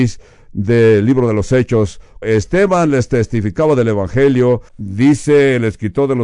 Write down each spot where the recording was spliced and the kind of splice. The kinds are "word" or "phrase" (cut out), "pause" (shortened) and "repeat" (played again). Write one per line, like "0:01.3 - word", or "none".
0:02.2 - word
0:04.7 - pause